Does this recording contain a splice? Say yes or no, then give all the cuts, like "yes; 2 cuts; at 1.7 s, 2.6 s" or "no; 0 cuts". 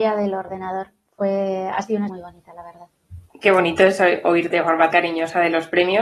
yes; 3 cuts; at 2.1 s, 4.5 s, 4.9 s